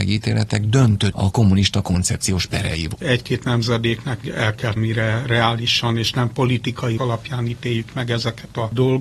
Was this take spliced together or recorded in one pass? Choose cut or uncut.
cut